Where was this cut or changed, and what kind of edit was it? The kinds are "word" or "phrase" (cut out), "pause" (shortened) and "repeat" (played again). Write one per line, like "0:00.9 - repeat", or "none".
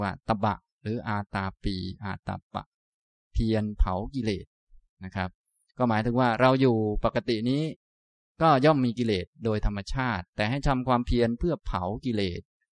none